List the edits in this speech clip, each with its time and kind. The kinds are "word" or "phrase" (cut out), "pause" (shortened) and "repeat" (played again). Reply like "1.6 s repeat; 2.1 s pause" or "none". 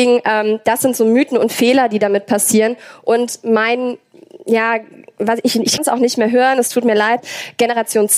5.8 s word